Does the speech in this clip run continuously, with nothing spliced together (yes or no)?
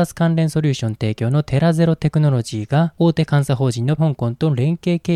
no